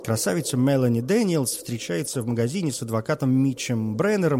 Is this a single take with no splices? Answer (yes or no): yes